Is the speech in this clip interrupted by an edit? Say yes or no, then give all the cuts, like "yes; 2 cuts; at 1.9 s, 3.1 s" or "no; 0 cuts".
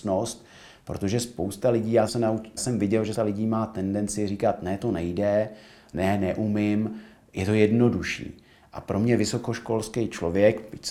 yes; 4 cuts; at 2.1 s, 2.6 s, 3.1 s, 5.9 s